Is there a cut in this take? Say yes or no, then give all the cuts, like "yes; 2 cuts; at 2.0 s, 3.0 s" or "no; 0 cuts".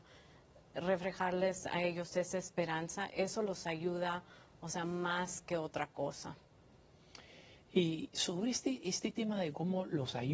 no; 0 cuts